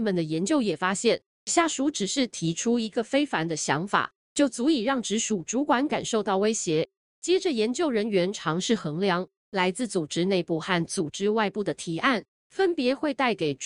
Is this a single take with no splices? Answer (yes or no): yes